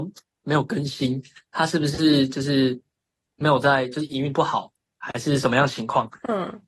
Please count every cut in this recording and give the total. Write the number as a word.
zero